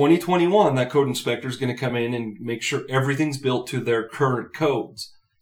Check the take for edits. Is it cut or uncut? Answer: uncut